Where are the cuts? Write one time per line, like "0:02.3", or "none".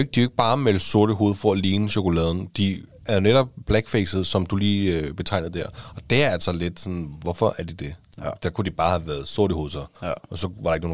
0:09.9